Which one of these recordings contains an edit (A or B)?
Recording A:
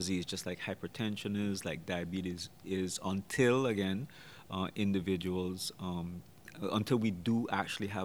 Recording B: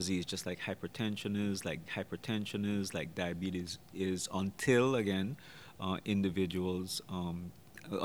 B